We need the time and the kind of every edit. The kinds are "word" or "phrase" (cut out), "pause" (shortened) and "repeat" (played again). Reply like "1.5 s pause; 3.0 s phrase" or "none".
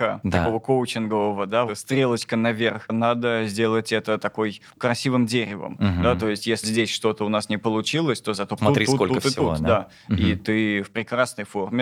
1.7 s word; 6.6 s word; 8.6 s word